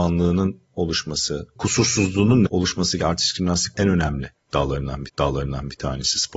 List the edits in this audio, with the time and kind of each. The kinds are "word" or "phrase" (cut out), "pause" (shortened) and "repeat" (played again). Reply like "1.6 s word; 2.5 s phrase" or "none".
1.6 s word; 2.5 s word; 3.0 s phrase; 5.1 s repeat